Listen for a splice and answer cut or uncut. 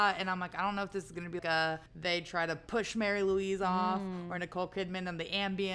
cut